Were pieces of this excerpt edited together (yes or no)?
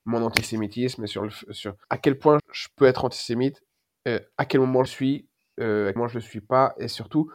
yes